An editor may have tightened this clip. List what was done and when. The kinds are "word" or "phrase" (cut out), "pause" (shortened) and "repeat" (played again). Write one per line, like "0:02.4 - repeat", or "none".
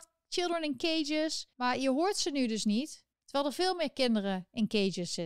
0:01.5 - pause
0:03.1 - pause